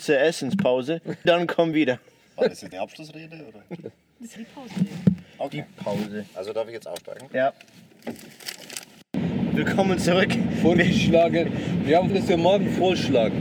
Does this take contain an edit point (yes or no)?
yes